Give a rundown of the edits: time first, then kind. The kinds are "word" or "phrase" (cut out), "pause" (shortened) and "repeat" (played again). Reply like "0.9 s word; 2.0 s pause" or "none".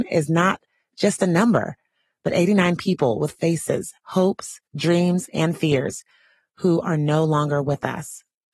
4.0 s word; 4.7 s pause